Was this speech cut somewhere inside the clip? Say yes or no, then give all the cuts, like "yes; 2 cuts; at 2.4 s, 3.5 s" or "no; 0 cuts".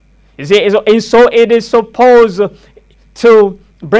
no; 0 cuts